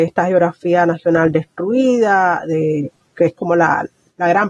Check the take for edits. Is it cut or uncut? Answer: uncut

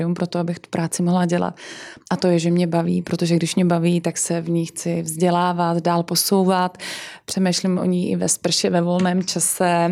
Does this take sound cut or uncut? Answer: uncut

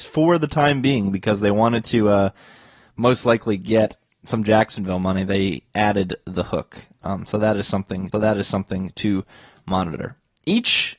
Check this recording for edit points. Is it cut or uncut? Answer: cut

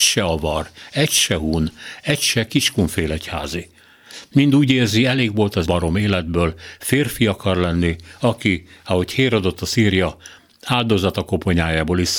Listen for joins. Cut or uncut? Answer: cut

